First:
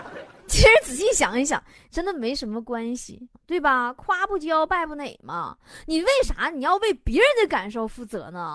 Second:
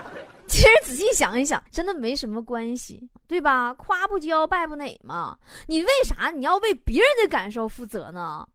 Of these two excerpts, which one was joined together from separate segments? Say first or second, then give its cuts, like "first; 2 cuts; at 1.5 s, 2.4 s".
second; 1 cut; at 1.7 s